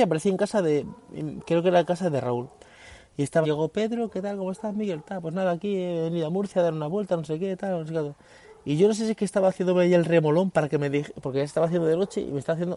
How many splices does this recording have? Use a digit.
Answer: 1